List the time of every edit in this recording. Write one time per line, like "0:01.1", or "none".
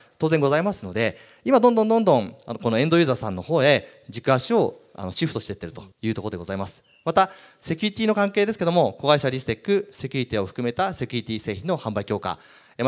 0:05.9